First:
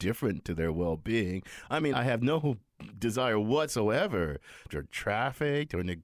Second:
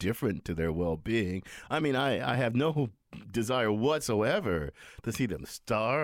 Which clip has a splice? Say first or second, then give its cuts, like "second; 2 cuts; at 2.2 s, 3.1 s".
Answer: first; 2 cuts; at 1.9 s, 4.7 s